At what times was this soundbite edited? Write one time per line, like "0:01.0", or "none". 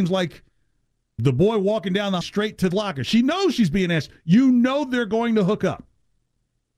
0:01.2
0:02.2
0:02.7